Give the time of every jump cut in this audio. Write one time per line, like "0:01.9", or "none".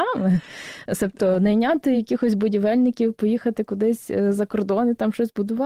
none

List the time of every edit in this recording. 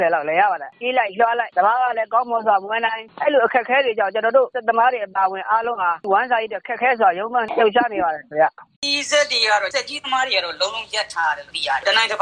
0:08.7

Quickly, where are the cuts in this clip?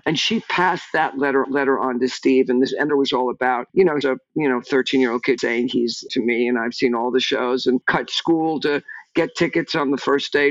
0:01.4
0:02.9
0:04.0
0:05.4
0:06.1

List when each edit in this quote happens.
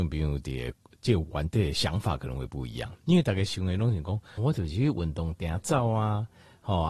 0:04.4

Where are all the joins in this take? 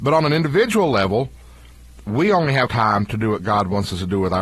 0:02.7

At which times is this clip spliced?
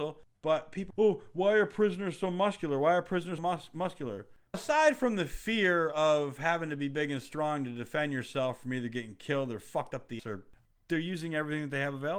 0:00.9
0:03.4
0:04.5
0:10.2

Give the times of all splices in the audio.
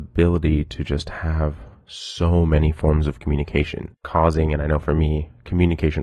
0:03.9

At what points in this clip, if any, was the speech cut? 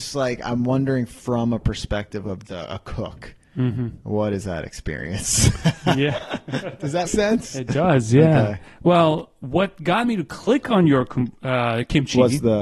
0:02.4
0:07.1

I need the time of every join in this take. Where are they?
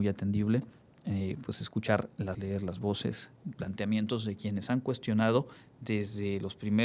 0:02.3
0:03.6

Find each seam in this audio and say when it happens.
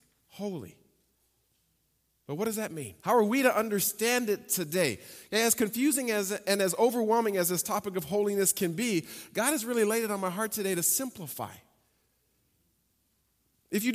0:03.0

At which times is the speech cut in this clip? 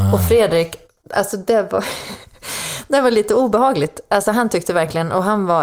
none

